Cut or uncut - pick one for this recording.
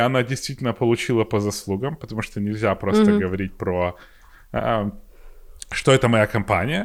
uncut